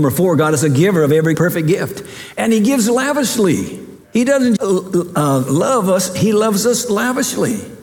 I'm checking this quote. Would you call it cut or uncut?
cut